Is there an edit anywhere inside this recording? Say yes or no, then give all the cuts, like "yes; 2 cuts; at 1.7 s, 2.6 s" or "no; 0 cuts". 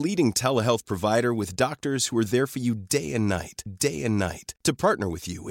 yes; 1 cut; at 3.7 s